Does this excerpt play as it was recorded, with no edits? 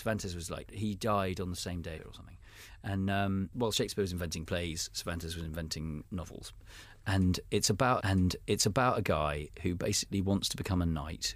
no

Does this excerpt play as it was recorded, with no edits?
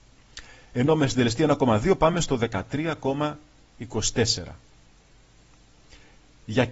yes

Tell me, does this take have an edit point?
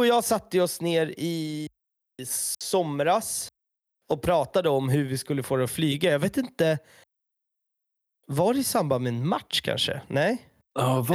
no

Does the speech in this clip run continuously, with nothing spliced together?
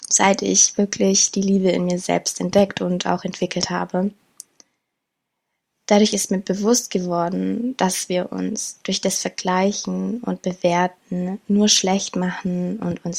yes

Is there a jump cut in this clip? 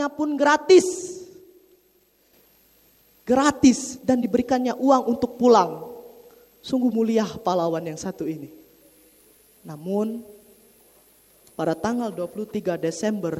no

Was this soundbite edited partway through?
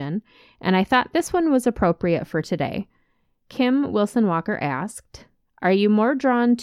no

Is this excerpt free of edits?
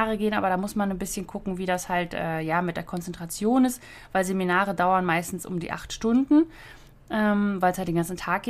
yes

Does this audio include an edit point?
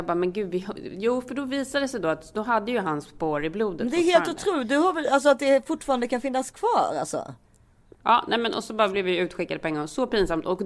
no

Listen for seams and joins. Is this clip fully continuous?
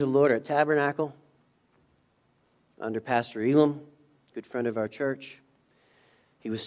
yes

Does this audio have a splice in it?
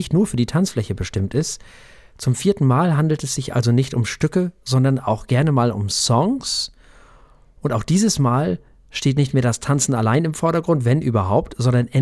no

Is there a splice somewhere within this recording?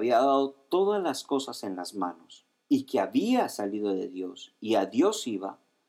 no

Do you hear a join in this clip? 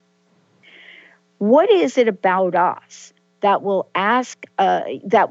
no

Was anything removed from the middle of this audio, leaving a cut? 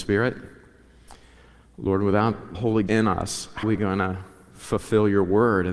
yes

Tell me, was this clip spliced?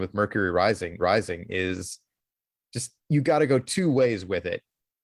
yes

